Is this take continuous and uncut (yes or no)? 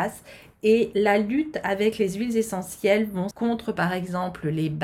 no